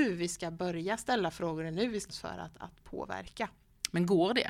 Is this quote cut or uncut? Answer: cut